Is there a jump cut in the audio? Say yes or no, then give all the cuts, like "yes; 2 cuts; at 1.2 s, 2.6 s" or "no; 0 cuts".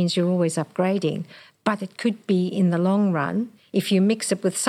no; 0 cuts